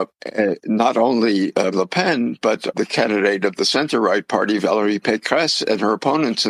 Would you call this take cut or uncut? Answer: cut